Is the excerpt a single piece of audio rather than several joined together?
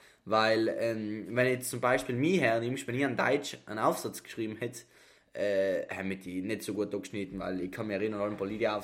yes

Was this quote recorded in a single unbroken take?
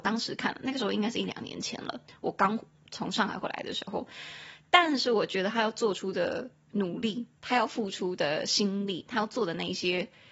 yes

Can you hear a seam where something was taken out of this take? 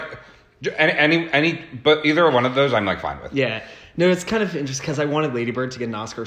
no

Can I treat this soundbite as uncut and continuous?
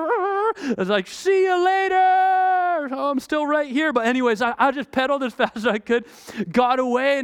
yes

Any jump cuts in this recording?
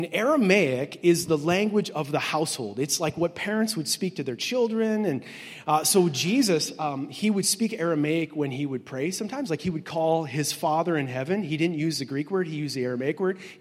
no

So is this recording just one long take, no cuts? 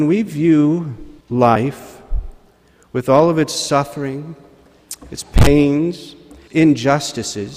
no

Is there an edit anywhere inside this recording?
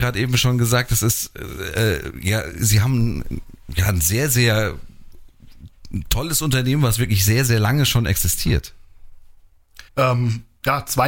yes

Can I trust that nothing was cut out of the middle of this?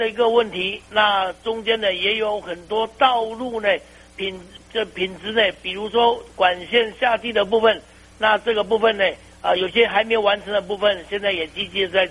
yes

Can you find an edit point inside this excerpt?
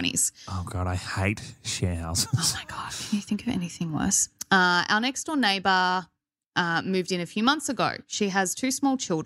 no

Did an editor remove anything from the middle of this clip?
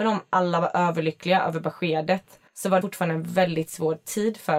yes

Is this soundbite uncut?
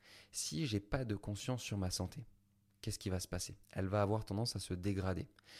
no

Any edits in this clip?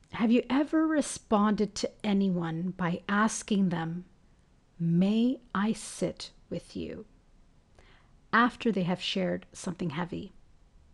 no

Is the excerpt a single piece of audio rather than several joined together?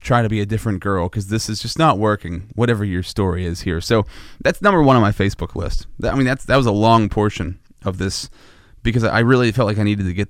yes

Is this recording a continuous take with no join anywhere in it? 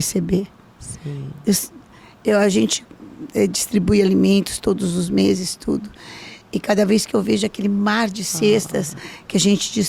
yes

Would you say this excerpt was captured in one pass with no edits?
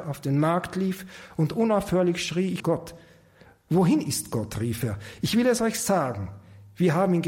no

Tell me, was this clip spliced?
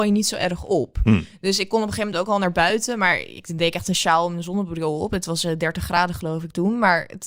no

